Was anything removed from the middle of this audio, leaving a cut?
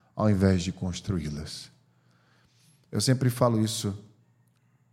no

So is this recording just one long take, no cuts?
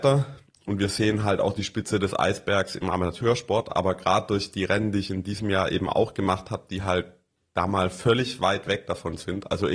yes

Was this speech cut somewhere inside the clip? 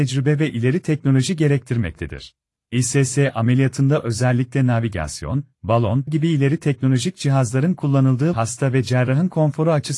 yes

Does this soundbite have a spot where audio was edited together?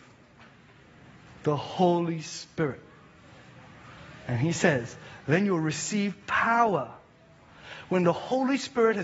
no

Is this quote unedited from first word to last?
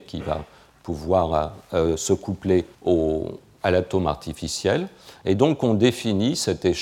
no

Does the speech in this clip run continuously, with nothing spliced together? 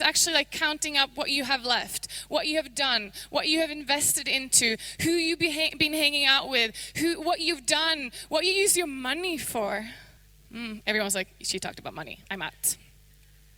no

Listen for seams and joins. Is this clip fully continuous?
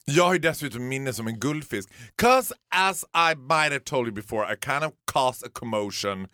no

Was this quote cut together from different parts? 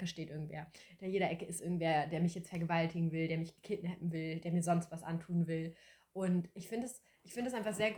no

